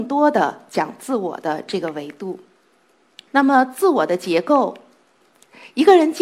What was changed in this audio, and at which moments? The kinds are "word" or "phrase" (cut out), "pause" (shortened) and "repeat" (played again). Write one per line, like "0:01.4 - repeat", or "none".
none